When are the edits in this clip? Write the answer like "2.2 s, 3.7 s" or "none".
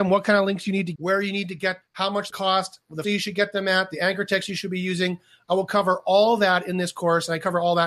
1.0 s, 1.8 s, 2.3 s, 3.0 s

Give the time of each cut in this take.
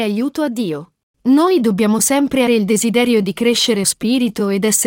2.5 s, 3.8 s

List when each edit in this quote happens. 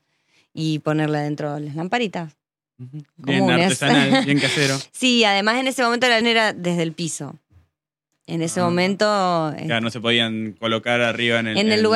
6.2 s

